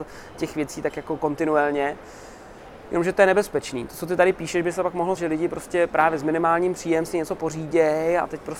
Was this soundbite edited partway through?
yes; 1 cut; at 5.2 s

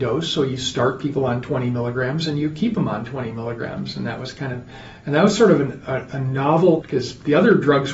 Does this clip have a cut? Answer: yes; 1 cut; at 6.8 s

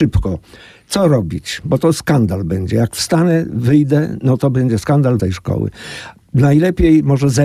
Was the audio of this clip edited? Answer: yes; 1 cut; at 5.2 s

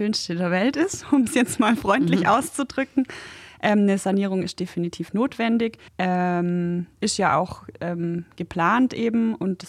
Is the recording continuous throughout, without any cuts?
no; 1 cut; at 5.9 s

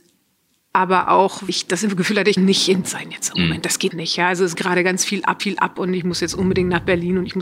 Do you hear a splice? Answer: yes; 6 cuts; at 1.5 s, 2.4 s, 2.8 s, 3.9 s, 4.5 s, 5.4 s

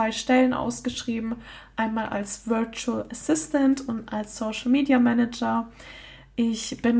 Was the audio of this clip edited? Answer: no; 0 cuts

